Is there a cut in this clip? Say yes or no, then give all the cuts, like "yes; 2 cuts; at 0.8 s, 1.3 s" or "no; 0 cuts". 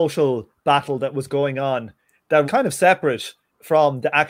yes; 1 cut; at 2.4 s